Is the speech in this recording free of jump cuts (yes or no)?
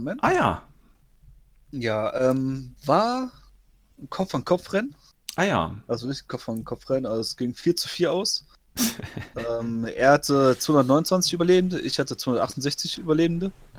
yes